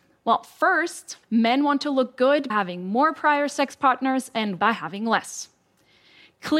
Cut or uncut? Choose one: cut